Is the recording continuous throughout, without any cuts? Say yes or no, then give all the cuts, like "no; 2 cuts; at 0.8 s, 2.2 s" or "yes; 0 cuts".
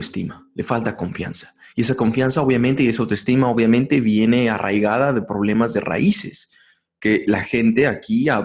yes; 0 cuts